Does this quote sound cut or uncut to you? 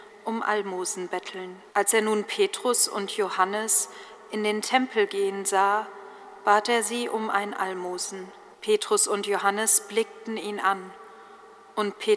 cut